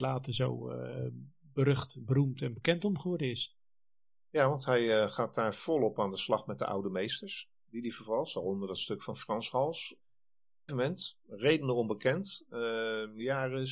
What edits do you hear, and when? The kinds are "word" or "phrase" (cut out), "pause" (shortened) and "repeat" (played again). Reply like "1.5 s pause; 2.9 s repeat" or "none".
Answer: 10.7 s phrase